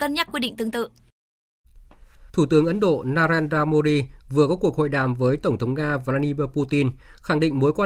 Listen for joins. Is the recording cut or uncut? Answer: cut